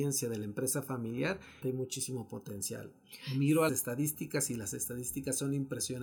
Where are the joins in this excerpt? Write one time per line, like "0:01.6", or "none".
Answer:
0:01.6
0:03.7